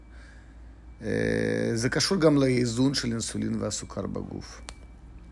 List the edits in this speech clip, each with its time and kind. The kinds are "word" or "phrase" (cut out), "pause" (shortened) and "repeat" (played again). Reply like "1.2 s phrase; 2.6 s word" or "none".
none